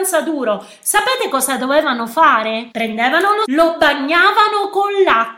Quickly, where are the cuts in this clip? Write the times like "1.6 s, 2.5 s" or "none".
2.7 s, 3.4 s